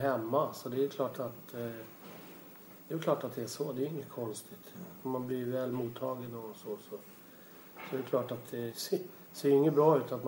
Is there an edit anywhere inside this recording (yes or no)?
yes